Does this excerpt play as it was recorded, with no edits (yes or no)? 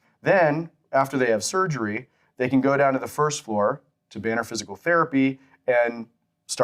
yes